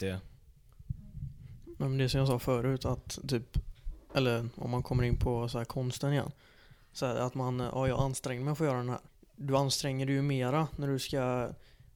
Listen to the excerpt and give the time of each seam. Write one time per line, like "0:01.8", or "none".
0:09.1